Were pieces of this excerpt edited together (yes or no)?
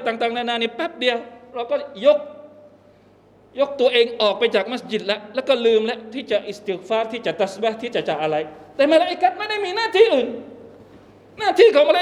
no